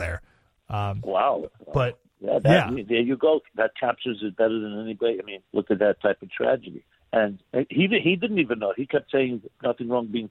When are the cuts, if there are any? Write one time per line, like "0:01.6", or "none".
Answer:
0:01.5
0:05.4
0:07.0